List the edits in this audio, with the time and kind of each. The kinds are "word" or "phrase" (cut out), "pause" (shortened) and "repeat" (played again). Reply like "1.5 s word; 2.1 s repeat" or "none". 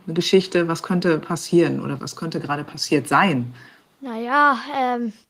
1.2 s phrase; 2.0 s word; 3.7 s pause